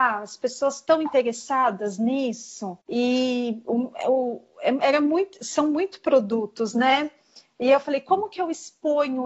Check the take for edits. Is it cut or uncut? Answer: cut